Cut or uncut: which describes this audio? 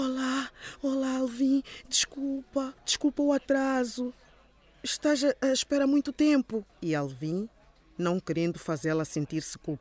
cut